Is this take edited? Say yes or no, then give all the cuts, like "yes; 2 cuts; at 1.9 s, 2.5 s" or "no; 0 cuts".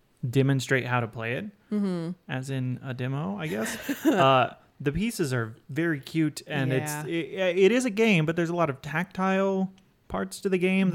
no; 0 cuts